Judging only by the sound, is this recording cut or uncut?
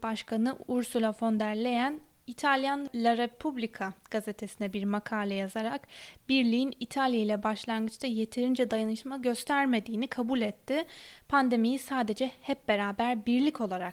uncut